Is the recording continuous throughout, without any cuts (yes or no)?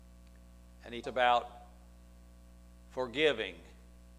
no